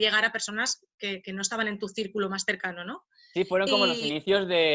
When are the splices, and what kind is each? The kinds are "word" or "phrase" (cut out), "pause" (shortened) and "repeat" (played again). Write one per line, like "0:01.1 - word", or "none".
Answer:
none